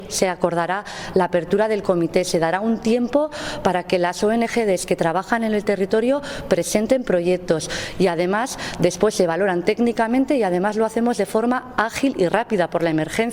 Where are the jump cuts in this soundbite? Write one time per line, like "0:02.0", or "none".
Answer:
none